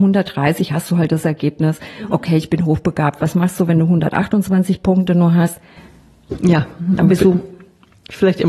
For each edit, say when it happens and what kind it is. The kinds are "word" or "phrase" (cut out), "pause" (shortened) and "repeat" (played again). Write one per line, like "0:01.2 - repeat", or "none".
none